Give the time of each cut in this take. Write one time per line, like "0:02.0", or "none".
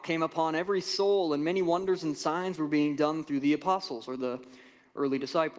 none